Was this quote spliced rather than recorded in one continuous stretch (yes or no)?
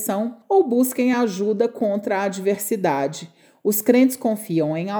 no